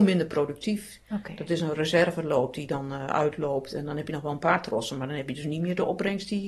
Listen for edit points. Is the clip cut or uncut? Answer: uncut